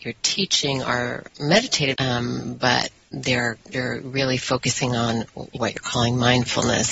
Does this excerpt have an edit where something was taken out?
yes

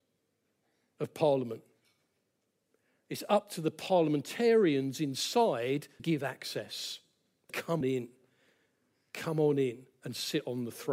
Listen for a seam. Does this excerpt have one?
yes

